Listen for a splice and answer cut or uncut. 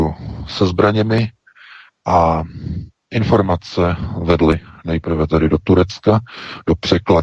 uncut